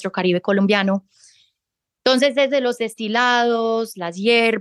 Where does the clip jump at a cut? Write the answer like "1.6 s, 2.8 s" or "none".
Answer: none